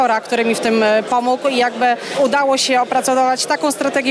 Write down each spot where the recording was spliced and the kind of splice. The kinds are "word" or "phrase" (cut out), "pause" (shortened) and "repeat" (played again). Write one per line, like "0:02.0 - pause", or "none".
none